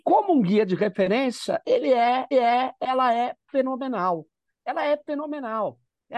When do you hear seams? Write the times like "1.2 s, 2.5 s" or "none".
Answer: 2.3 s